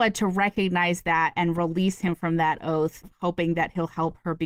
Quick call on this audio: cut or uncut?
cut